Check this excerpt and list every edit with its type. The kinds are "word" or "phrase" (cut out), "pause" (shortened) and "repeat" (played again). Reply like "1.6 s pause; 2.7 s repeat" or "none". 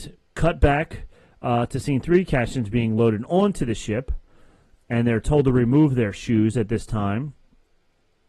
none